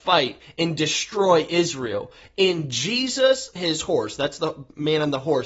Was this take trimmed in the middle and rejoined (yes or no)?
yes